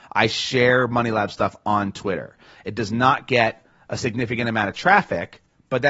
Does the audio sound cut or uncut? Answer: uncut